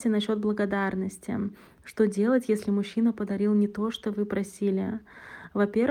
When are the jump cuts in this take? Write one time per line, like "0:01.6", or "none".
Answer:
none